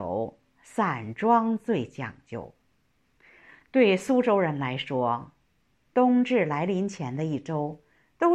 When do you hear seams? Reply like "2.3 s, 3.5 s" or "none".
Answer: none